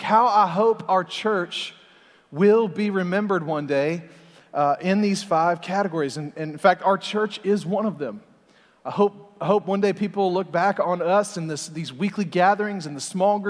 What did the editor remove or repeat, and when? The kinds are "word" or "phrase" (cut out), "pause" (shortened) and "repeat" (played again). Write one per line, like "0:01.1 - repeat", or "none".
none